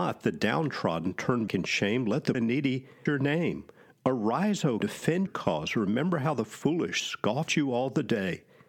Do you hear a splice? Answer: yes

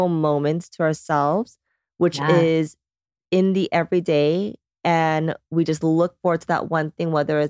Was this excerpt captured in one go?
yes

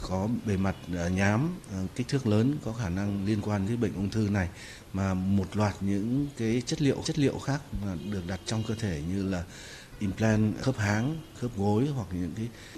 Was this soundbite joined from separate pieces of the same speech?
yes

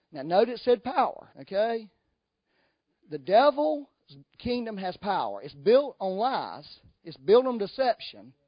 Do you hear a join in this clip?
yes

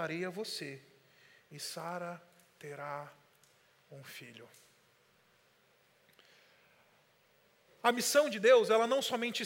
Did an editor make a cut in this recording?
no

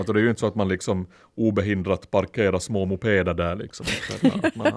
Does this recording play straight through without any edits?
yes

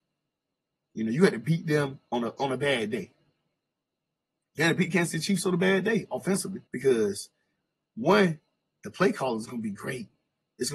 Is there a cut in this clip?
yes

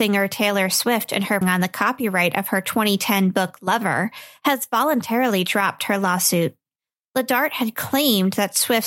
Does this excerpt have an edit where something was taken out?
yes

